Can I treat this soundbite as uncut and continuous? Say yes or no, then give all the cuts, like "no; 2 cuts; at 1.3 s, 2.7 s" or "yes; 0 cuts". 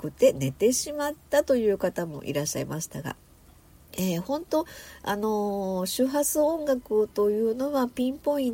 yes; 0 cuts